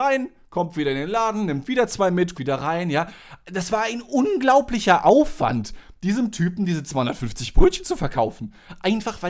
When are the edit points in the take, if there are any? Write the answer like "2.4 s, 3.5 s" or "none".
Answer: 2.3 s